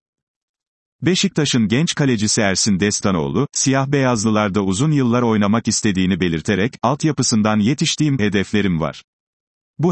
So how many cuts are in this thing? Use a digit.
1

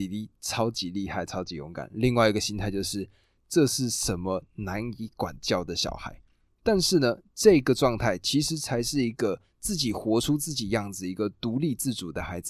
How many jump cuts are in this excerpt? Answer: 0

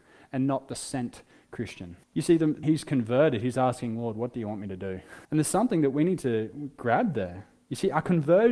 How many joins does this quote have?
3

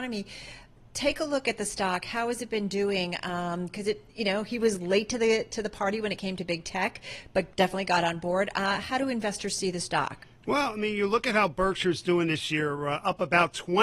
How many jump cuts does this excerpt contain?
1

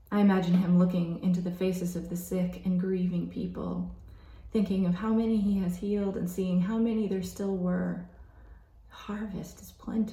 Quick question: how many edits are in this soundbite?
0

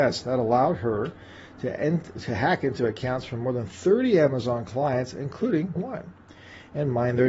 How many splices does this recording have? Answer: 1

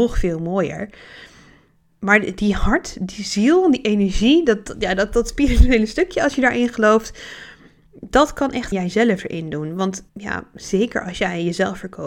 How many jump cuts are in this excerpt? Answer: 2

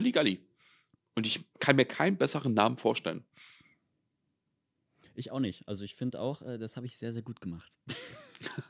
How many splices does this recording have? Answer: 0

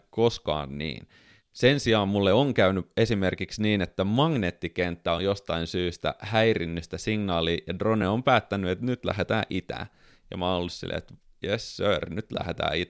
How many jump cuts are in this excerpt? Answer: 0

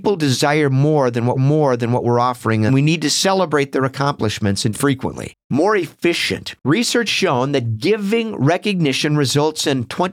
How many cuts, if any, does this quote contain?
5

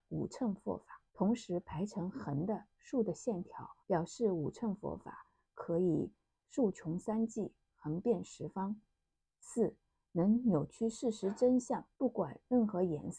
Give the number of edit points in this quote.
3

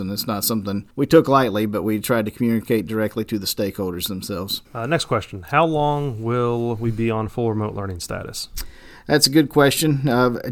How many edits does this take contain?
2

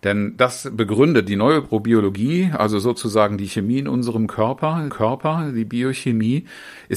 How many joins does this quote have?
1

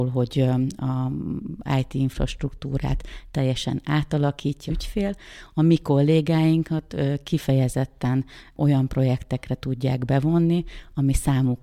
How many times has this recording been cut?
1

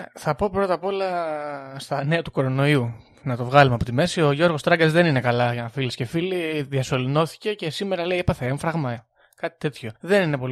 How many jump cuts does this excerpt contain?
0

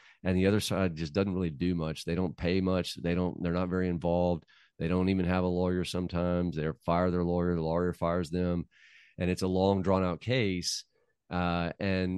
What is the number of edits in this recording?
0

